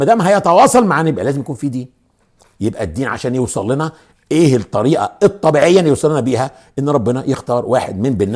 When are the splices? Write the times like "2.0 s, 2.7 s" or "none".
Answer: none